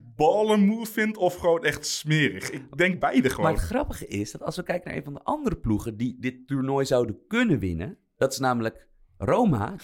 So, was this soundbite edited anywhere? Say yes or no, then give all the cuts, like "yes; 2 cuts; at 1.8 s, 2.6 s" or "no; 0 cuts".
no; 0 cuts